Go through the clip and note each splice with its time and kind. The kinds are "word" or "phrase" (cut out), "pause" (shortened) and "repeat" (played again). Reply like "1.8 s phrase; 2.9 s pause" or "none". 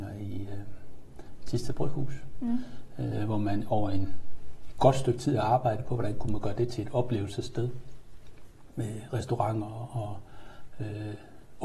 none